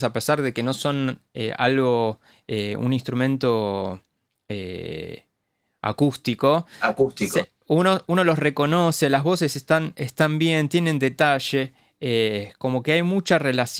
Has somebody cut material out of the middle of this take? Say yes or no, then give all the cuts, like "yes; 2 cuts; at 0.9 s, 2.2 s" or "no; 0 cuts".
no; 0 cuts